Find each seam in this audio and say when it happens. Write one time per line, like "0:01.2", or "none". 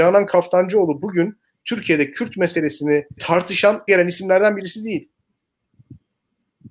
0:03.2
0:03.9